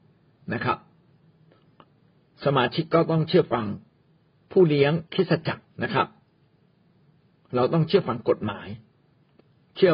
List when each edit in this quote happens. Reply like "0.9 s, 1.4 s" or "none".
5.1 s, 5.7 s